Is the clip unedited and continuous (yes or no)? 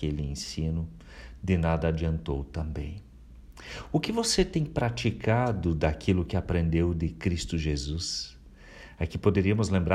yes